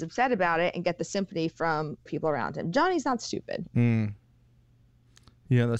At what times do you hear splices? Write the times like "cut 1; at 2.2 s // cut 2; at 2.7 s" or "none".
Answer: cut 1; at 2.1 s